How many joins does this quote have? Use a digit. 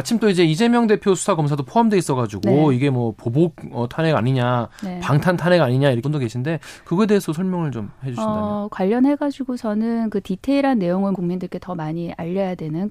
2